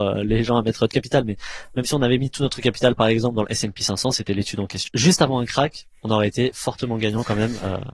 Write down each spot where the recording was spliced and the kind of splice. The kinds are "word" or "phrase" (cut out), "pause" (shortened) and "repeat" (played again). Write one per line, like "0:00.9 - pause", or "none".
0:00.9 - word
0:04.9 - phrase